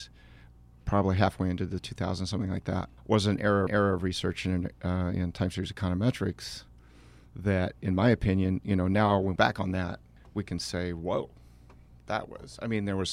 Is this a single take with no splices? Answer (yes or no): no